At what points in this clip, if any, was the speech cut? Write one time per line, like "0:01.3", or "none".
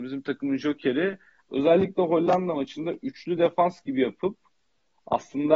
none